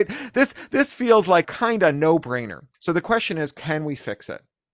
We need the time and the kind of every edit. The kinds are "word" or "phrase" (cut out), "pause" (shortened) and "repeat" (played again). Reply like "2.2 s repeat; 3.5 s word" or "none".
1.4 s word; 2.7 s pause